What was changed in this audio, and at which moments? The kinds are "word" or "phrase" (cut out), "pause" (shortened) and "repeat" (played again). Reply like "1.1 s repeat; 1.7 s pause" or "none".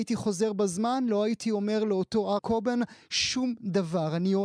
2.4 s word